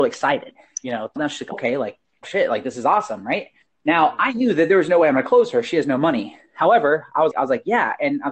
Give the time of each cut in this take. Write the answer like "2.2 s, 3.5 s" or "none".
1.2 s, 1.5 s, 2.2 s, 3.7 s, 7.3 s

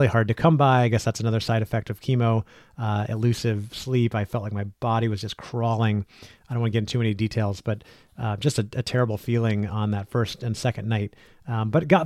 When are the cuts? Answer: 4.7 s

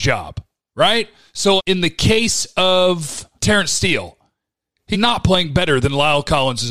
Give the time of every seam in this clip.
1.6 s, 3.4 s, 4.9 s

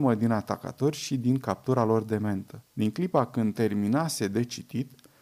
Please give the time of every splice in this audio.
2.6 s

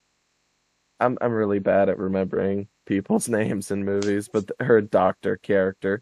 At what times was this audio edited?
none

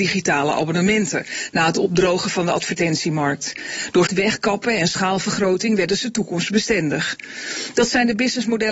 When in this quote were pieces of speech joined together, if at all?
4.1 s

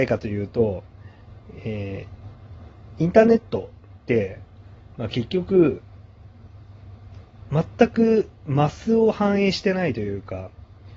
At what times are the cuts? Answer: none

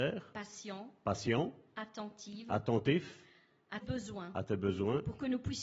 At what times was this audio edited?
3.8 s

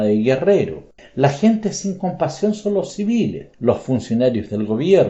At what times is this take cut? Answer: 1.0 s, 3.5 s

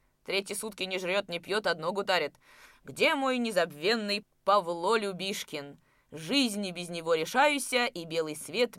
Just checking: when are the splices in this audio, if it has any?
none

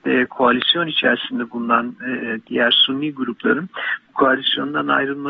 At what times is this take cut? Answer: none

